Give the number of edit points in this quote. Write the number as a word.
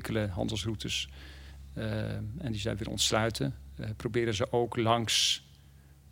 zero